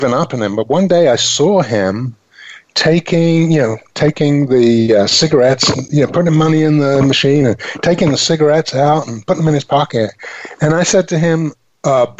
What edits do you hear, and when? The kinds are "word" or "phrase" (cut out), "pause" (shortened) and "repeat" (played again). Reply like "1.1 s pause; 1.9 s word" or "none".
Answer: none